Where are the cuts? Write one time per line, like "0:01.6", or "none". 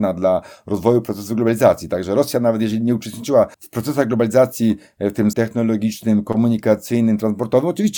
0:03.5
0:05.3